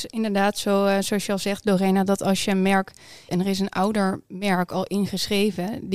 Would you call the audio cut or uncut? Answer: cut